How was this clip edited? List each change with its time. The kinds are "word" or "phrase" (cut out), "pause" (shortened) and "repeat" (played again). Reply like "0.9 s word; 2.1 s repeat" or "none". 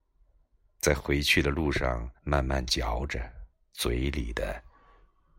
2.2 s pause; 3.5 s pause

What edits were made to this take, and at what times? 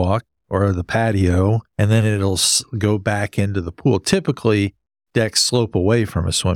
1.7 s pause

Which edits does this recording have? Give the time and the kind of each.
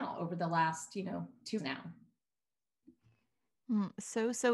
1.6 s word

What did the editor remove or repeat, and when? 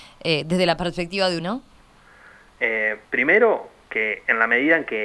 1.4 s word; 3.0 s pause

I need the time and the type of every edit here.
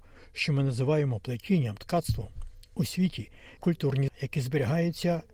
1.8 s word; 3.6 s word; 4.1 s word

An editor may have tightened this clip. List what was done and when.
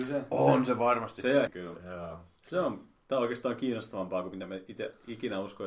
1.5 s word

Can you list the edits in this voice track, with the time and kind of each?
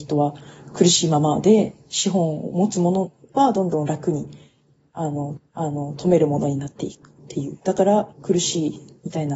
5.4 s repeat; 7.2 s pause; 8.1 s pause

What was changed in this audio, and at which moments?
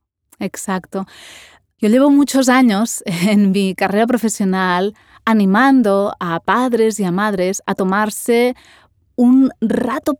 none

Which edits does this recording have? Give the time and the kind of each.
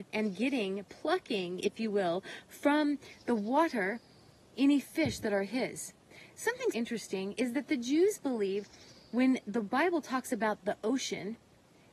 6.7 s word

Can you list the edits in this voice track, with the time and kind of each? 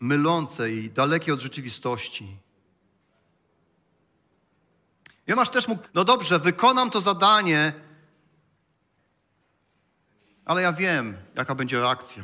5.8 s word

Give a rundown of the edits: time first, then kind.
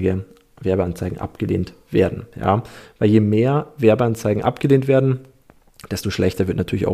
none

